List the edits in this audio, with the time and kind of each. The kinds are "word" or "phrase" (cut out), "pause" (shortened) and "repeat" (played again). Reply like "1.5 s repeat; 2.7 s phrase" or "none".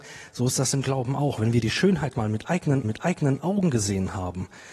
2.1 s word; 2.8 s repeat